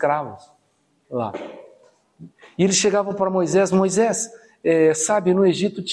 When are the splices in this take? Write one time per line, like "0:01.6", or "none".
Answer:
none